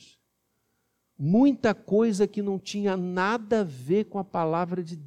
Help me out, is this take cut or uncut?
uncut